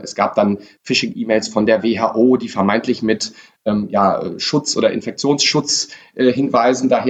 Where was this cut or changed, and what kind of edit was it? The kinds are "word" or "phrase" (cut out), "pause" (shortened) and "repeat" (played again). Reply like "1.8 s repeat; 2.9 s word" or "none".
none